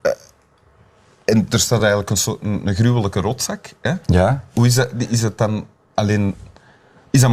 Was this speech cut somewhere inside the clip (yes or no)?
no